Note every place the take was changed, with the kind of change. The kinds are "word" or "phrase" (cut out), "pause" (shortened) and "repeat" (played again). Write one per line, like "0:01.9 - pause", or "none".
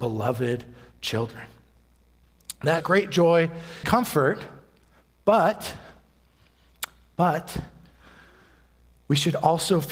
0:02.8 - phrase
0:03.8 - word